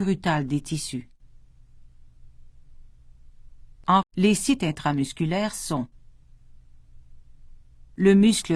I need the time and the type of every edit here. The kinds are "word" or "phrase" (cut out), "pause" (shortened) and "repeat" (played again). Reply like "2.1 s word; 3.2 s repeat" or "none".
4.0 s word

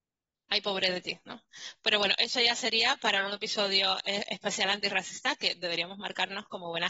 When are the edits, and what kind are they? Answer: none

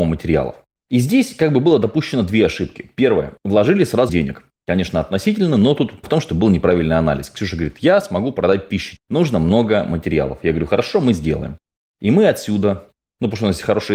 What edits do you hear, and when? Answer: 4.1 s word; 6.0 s word; 9.0 s word

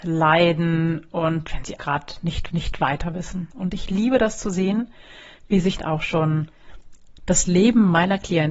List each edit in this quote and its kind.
1.8 s word; 2.5 s repeat; 5.8 s phrase

